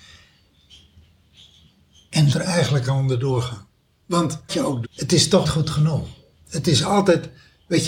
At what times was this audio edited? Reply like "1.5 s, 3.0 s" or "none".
2.3 s, 4.5 s, 4.8 s, 5.4 s